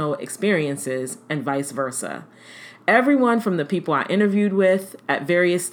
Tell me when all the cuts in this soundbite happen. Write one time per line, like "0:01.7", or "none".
none